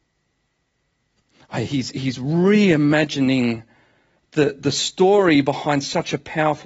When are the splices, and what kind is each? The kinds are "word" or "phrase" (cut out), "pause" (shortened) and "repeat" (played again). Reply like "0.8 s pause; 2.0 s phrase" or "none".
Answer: none